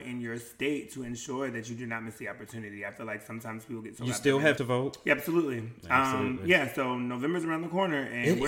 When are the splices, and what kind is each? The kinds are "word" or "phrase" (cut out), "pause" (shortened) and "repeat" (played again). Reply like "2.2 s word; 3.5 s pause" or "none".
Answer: 4.6 s phrase